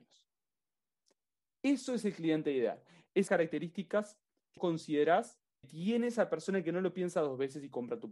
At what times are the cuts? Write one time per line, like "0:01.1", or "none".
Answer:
0:03.3
0:04.6
0:05.6